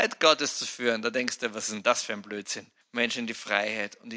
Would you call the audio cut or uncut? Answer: uncut